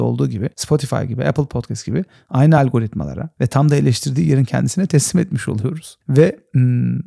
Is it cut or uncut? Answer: uncut